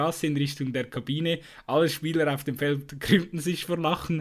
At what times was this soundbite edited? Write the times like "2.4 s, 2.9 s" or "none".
none